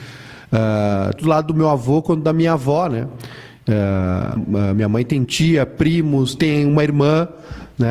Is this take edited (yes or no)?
yes